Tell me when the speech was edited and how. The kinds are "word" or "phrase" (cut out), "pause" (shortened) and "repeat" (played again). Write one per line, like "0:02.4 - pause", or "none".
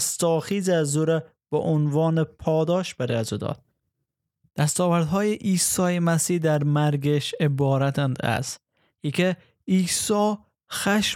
none

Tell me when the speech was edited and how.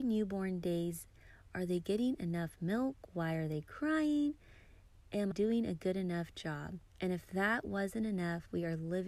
0:05.3 - word
0:06.9 - pause

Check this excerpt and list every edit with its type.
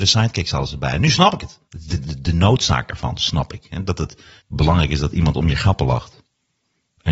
0:01.6 - pause
0:04.4 - pause

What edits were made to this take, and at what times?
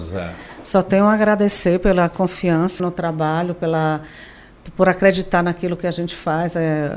0:02.8 - word

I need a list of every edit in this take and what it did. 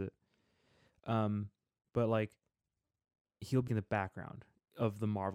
0:03.7 - word

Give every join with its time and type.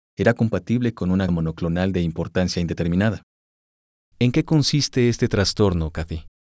0:01.3 - word

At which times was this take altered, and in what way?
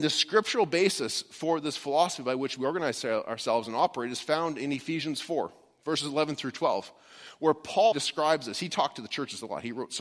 0:07.9 - word

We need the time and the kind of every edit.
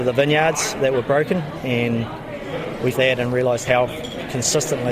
0:02.9 - word
0:03.7 - word

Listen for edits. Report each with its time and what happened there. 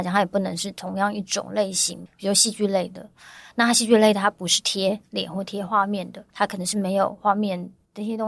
0:06.3 - pause

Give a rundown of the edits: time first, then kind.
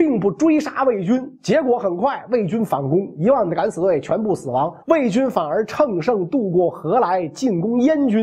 0:04.8 - pause

